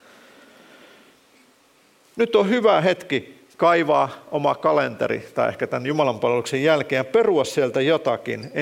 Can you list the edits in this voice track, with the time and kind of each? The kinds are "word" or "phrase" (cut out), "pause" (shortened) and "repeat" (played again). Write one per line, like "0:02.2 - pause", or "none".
none